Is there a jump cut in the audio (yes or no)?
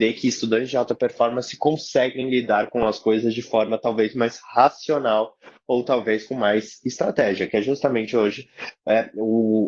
no